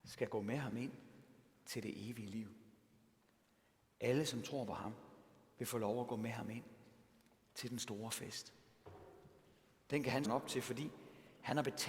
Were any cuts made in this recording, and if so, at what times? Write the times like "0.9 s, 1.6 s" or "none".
10.2 s